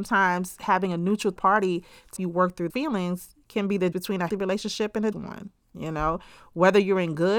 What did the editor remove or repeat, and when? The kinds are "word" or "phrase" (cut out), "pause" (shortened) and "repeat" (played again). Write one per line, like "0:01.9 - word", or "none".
0:01.4 - word
0:02.2 - word
0:02.7 - word
0:03.9 - word
0:04.3 - word
0:05.1 - word